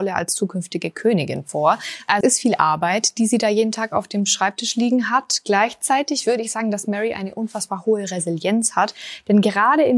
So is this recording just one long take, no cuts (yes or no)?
no